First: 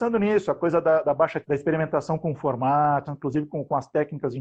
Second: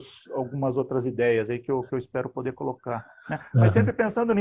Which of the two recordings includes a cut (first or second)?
first